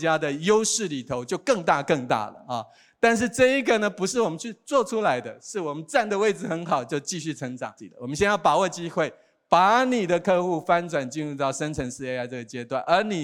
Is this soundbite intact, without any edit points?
yes; 0 cuts

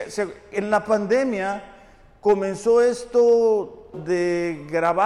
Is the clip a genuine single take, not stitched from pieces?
no; 1 cut; at 3.9 s

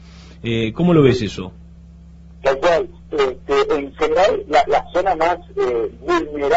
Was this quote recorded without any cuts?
yes; 0 cuts

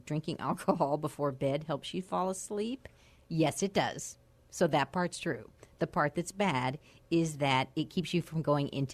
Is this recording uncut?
yes; 0 cuts

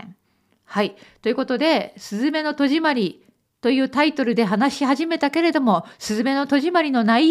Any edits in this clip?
no; 0 cuts

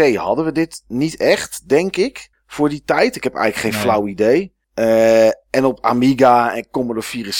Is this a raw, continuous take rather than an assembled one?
no; 2 cuts; at 2.3 s, 4.6 s

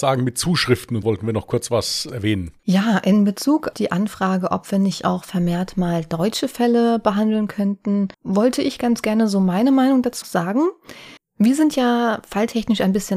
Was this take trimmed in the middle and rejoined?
yes; 6 cuts; at 1.0 s, 2.6 s, 3.7 s, 8.1 s, 10.2 s, 11.2 s

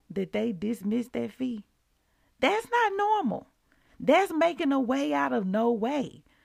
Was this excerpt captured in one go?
yes; 0 cuts

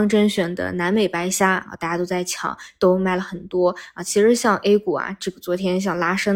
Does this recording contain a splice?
no; 0 cuts

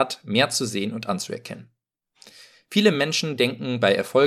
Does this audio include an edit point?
no; 0 cuts

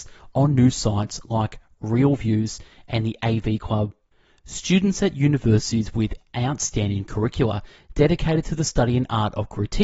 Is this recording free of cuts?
yes; 0 cuts

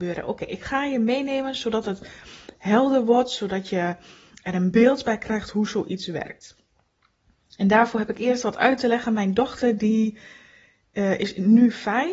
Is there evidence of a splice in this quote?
no; 0 cuts

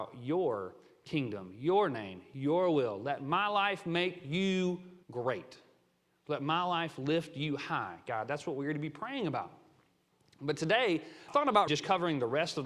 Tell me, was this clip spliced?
yes; 3 cuts; at 5.0 s, 11.3 s, 11.7 s

